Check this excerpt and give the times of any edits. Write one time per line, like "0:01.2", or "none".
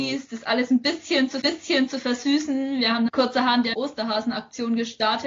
0:01.4
0:03.1
0:03.7